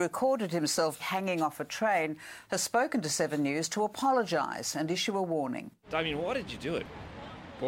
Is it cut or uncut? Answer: cut